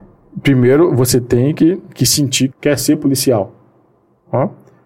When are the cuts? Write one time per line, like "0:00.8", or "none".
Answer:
0:02.5